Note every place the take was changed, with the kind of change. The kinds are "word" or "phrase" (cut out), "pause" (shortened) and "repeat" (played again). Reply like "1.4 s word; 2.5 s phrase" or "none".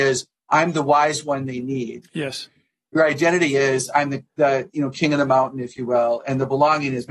none